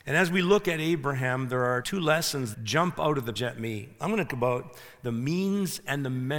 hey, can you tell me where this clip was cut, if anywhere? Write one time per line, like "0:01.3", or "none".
0:01.8
0:02.5
0:03.4
0:04.3